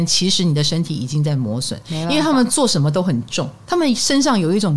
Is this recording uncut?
no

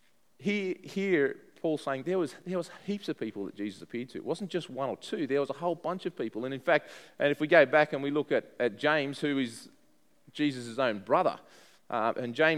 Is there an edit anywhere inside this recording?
no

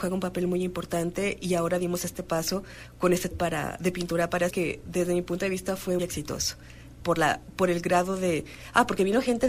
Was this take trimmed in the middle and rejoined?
yes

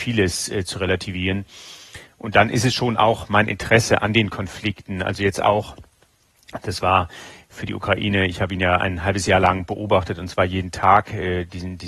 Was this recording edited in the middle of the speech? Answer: no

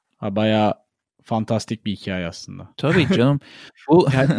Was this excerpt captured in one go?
no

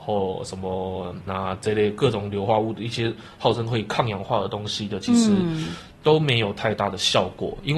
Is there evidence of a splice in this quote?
yes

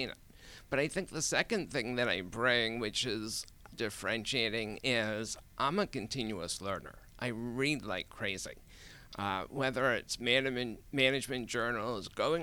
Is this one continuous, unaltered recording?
no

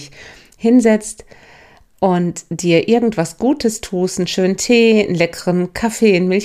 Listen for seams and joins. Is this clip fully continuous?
yes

